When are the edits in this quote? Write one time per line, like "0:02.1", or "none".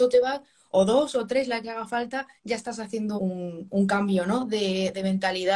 0:02.4
0:03.2